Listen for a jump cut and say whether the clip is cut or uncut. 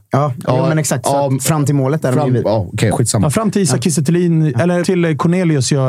cut